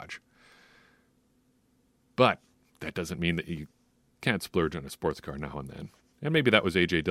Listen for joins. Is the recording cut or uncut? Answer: uncut